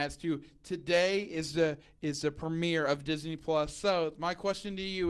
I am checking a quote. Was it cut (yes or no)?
no